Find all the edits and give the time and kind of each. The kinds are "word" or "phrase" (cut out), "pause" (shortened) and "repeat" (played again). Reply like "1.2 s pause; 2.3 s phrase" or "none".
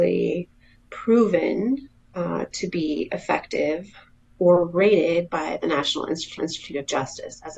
6.4 s repeat

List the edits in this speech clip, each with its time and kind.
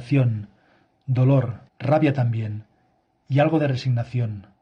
1.7 s pause

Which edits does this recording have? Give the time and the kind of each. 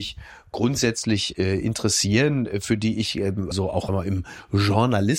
3.5 s word; 3.9 s word

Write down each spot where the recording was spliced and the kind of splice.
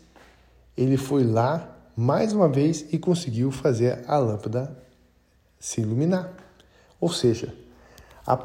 none

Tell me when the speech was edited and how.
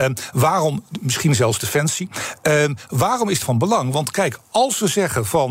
3.4 s phrase

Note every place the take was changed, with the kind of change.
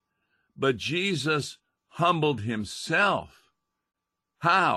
none

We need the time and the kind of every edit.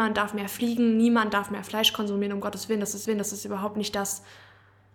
3.0 s repeat

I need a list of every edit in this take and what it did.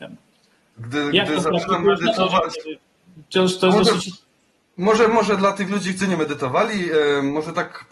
6.0 s word

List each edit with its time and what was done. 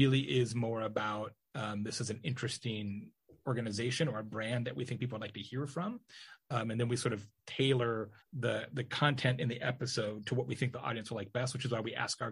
8.2 s pause

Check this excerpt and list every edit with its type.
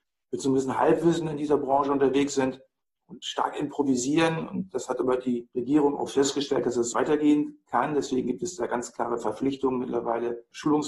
6.9 s word

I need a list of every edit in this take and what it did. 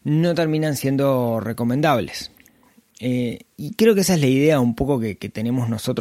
none

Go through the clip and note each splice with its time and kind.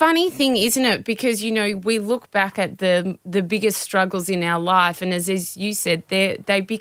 none

